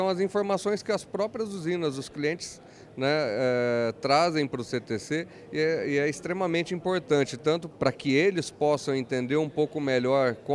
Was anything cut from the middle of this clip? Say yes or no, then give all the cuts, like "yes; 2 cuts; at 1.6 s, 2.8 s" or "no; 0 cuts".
yes; 1 cut; at 7.7 s